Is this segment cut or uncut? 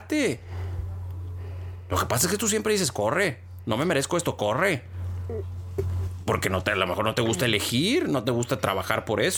uncut